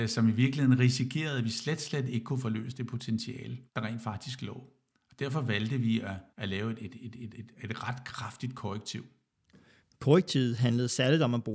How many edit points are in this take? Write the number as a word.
three